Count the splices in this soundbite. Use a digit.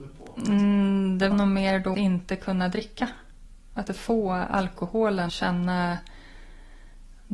4